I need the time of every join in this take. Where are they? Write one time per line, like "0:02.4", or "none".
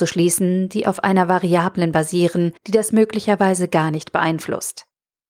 0:02.6
0:02.9